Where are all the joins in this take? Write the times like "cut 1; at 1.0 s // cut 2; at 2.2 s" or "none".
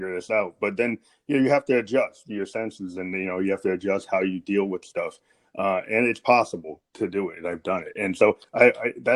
none